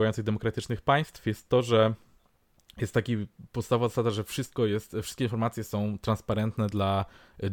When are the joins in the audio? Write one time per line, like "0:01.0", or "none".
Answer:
none